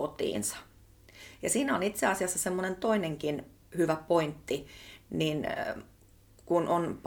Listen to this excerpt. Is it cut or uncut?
uncut